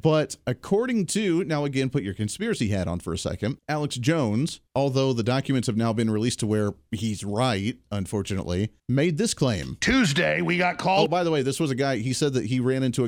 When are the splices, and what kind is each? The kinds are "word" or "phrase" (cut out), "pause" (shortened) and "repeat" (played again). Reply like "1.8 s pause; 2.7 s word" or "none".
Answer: 3.6 s pause; 4.7 s pause; 8.8 s pause